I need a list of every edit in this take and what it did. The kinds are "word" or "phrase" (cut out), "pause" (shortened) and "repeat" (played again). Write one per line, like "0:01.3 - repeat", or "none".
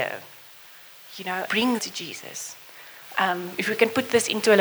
0:01.5 - word
0:01.8 - word